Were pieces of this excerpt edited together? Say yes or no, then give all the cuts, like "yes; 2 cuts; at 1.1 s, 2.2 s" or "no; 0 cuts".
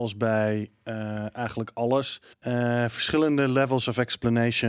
yes; 1 cut; at 2.3 s